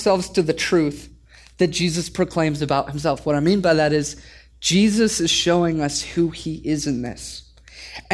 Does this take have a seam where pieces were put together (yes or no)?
no